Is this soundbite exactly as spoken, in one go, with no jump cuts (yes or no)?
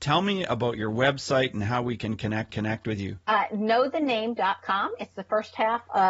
no